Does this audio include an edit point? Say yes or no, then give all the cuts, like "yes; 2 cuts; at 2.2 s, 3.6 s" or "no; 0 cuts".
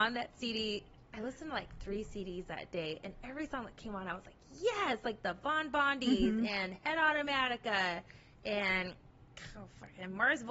no; 0 cuts